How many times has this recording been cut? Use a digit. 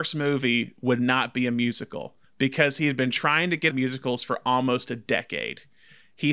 2